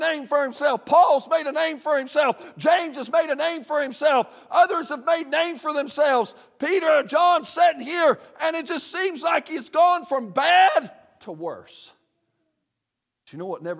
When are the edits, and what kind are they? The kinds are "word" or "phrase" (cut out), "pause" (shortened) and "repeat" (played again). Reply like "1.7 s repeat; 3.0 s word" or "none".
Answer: none